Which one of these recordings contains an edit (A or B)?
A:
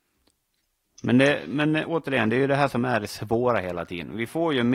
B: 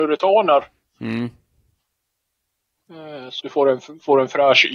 B